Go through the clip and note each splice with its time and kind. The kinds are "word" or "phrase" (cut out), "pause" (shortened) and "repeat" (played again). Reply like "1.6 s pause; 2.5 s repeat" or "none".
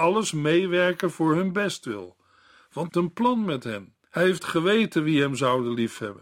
2.9 s phrase; 4.0 s pause; 4.4 s word